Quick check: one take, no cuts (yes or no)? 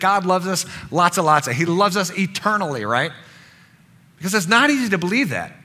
yes